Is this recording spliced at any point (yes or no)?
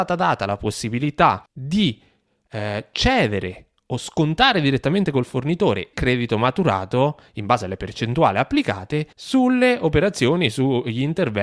yes